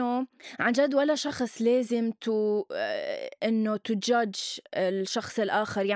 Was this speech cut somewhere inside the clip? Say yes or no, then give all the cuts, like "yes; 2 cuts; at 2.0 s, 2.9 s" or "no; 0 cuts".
no; 0 cuts